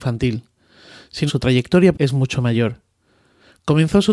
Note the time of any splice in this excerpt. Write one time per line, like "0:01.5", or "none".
0:01.3
0:01.9